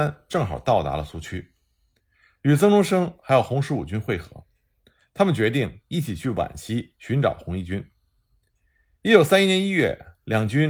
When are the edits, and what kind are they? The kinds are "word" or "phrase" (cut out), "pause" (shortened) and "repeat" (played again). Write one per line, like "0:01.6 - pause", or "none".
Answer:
none

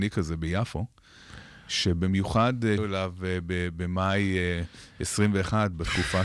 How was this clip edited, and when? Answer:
0:02.8 - word

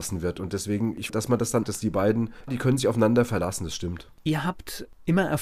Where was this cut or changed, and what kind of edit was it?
0:01.1 - word
0:01.6 - phrase
0:02.5 - word

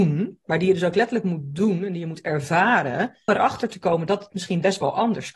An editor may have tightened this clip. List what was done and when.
0:03.3 - word

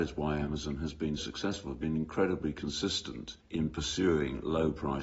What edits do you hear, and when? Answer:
0:01.2 - word
0:03.4 - pause

